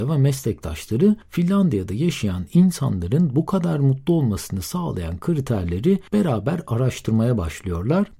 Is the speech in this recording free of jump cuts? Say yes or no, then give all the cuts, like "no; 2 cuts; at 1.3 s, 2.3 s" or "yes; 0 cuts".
no; 2 cuts; at 1.2 s, 6.1 s